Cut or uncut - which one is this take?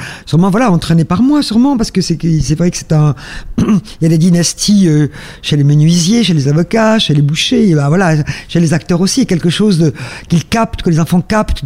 uncut